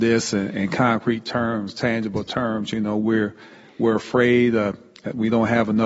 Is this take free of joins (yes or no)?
yes